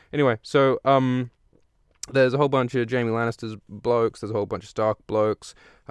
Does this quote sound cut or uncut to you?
uncut